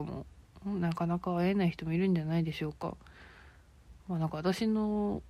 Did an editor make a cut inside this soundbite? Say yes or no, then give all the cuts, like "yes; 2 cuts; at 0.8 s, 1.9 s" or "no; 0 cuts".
yes; 1 cut; at 4.0 s